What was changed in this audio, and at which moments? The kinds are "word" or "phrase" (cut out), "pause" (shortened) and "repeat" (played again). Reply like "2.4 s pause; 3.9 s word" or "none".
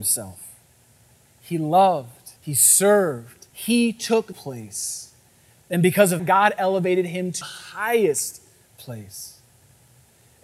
2.4 s pause; 3.5 s pause; 4.3 s phrase; 6.2 s word; 7.4 s word

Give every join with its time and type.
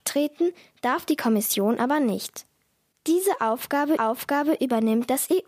4.0 s repeat

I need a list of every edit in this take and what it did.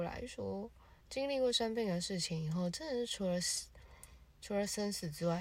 1.0 s pause

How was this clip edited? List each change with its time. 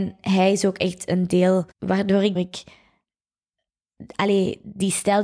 1.7 s pause; 2.3 s phrase

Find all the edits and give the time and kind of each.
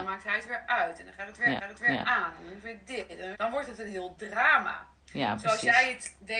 1.6 s repeat; 3.3 s word

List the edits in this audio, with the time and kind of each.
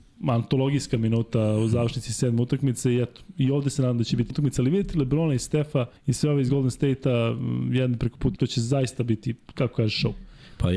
4.3 s word; 6.0 s pause; 8.4 s word

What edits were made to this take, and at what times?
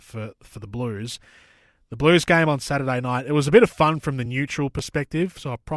none

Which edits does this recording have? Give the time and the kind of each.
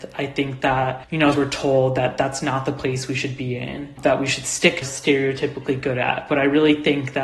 1.3 s word; 4.8 s phrase

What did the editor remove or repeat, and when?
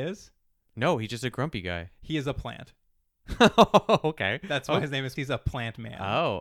5.2 s word

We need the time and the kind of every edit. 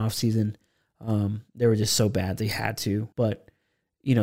3.1 s pause

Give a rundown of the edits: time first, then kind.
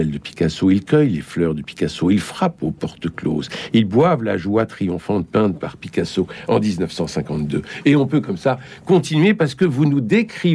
none

